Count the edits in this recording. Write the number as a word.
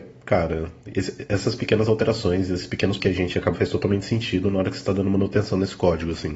two